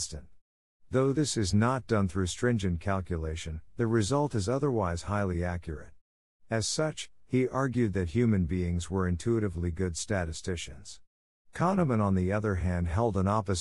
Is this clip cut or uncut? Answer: uncut